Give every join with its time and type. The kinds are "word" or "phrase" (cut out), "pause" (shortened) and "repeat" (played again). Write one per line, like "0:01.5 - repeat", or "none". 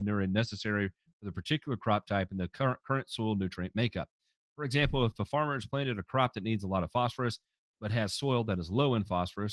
none